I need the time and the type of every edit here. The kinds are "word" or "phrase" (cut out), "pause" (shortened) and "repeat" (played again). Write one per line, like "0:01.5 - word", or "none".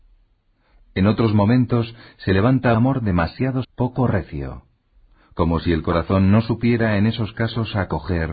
0:02.7 - word
0:03.6 - word